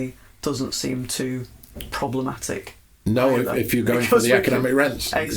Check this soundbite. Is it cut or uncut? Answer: uncut